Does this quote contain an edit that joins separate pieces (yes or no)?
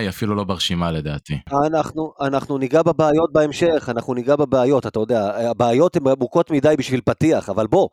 no